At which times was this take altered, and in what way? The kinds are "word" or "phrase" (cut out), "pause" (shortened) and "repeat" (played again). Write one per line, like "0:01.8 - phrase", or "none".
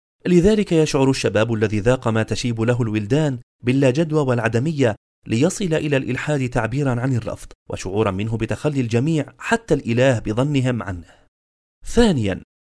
0:07.6 - pause

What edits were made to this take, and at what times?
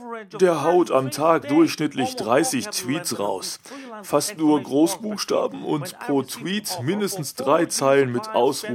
none

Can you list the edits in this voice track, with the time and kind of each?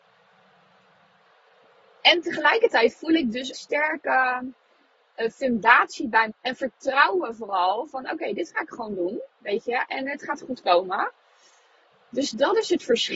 0:03.5 - word
0:06.3 - phrase

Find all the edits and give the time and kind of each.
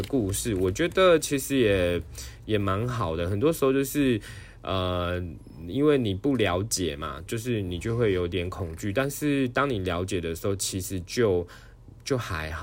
0:07.3 - word

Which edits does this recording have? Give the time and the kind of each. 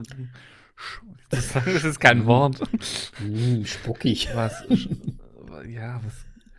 0:01.3 - phrase

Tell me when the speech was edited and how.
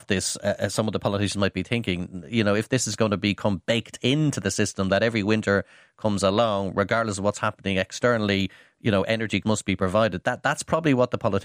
0:09.4 - word

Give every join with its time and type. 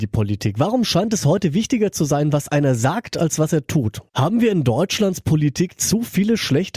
0:04.1 - pause

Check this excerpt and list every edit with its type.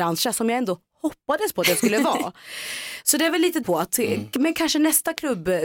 0:03.6 - phrase

